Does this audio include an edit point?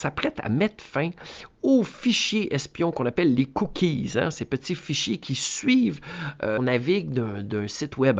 yes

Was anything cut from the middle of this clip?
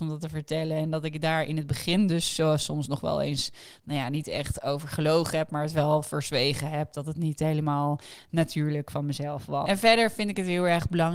no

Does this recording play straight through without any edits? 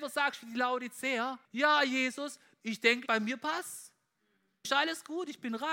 no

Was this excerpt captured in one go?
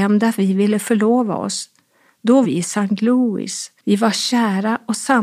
no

